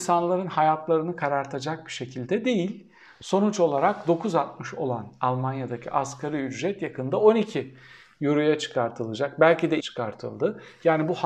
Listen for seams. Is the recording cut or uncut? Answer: cut